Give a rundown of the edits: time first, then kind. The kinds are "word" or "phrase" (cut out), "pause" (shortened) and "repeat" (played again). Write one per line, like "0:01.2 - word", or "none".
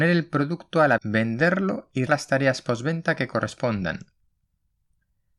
0:01.0 - word
0:02.1 - word